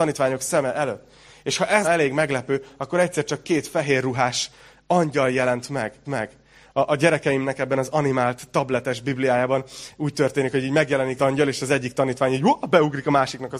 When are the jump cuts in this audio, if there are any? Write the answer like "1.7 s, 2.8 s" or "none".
1.8 s, 6.0 s, 11.2 s